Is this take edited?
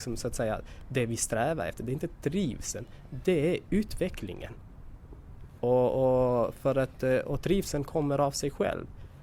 no; 0 cuts

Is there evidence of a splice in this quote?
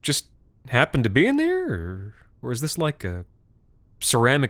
no; 0 cuts

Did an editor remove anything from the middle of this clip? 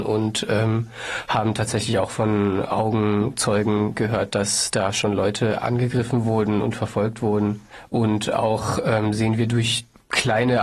no; 0 cuts

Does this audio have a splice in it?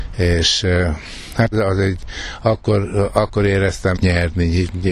yes; 2 cuts; at 1.5 s, 3.9 s

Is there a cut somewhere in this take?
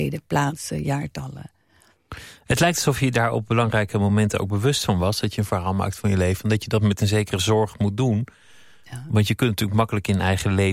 no; 0 cuts

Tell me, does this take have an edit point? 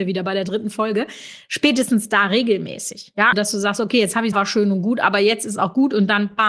yes; 2 cuts; at 3.3 s, 4.3 s

